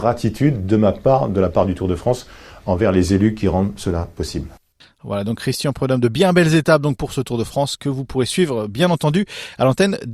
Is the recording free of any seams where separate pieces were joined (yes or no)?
yes